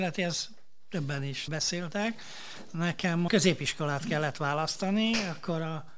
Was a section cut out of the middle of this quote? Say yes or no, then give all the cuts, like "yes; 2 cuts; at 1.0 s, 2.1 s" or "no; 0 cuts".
yes; 2 cuts; at 1.5 s, 3.3 s